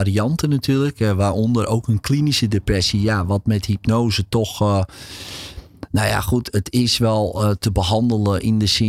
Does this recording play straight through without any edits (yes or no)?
yes